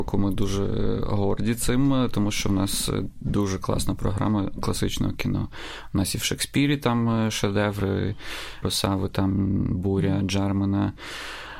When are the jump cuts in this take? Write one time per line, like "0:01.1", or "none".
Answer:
0:08.6